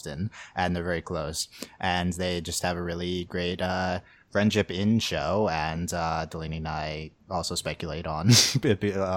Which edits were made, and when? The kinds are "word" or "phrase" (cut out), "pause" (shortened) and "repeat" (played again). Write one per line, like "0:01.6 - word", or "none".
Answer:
none